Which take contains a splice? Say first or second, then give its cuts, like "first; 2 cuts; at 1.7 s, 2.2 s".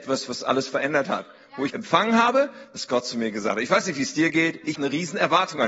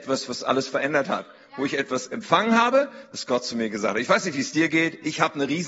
first; 2 cuts; at 1.7 s, 4.7 s